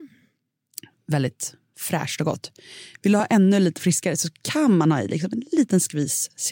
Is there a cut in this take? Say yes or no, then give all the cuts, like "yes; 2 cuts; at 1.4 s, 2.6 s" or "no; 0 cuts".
no; 0 cuts